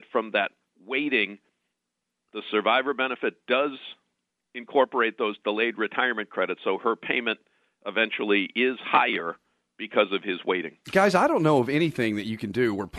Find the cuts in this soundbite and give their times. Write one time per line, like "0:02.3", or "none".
none